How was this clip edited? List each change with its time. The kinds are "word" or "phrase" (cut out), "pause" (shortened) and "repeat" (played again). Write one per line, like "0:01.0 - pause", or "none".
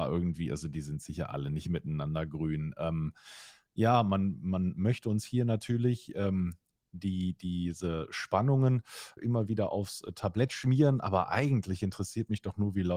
0:09.2 - word